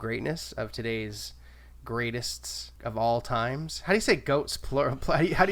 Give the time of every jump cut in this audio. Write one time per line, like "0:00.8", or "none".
0:02.8